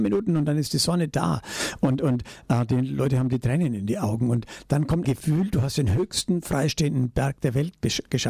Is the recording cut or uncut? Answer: cut